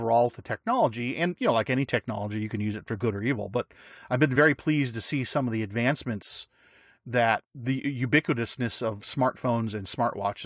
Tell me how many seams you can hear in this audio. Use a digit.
0